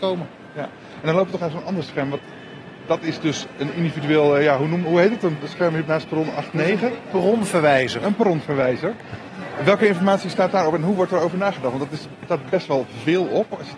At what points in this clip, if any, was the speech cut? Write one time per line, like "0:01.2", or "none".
0:01.4
0:05.8